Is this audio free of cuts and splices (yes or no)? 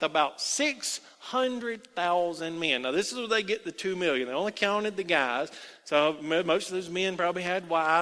yes